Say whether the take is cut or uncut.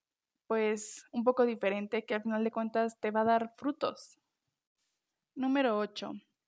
uncut